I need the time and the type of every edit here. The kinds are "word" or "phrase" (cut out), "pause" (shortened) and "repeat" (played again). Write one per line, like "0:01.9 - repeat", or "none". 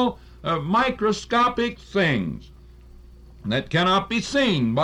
none